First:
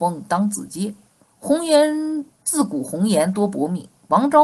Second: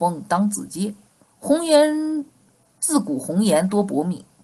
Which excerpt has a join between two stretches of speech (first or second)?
first